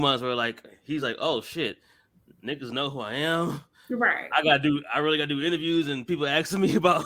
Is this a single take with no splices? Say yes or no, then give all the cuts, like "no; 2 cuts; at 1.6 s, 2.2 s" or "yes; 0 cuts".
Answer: yes; 0 cuts